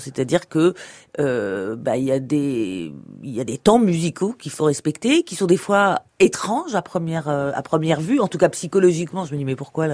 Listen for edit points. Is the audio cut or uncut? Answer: cut